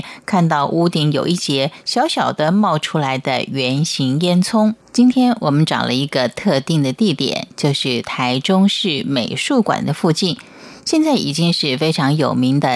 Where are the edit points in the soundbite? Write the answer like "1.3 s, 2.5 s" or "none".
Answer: 4.8 s